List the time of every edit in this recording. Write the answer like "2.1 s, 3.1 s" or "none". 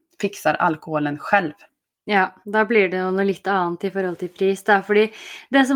2.4 s